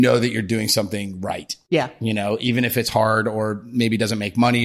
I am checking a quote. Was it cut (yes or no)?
no